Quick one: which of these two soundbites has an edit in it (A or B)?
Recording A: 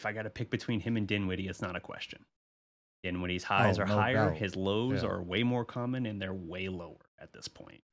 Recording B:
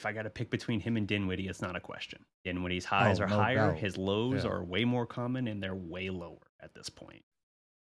B